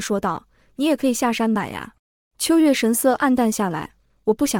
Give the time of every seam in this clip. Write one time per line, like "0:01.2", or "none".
0:02.0